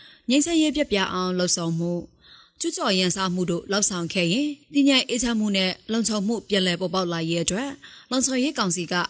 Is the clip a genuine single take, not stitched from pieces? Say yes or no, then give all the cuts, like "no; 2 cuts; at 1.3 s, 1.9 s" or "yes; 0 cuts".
no; 1 cut; at 4.6 s